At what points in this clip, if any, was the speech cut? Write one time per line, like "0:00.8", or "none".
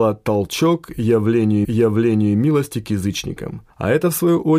0:01.6
0:03.7